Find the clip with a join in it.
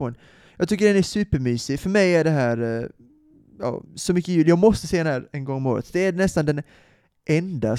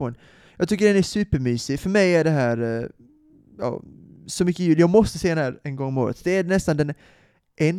first; 1 cut; at 3.9 s

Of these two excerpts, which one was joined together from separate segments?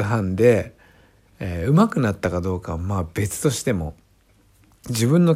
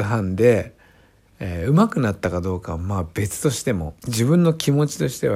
second; 1 cut; at 4.0 s

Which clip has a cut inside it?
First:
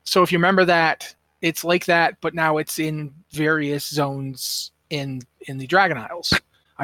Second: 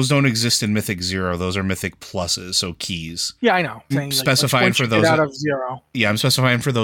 second; 2 cuts; at 3.4 s, 3.9 s

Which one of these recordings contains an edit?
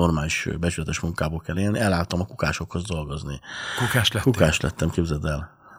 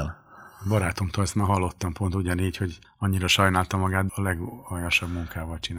second; 2 cuts; at 2.8 s, 4.1 s

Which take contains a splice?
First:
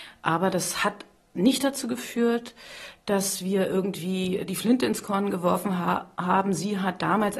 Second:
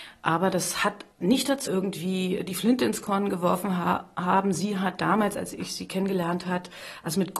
second; 2 cuts; at 1.1 s, 1.7 s

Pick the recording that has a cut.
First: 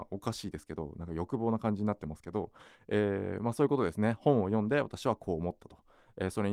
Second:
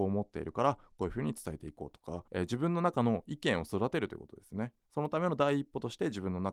second; 1 cut; at 2.3 s

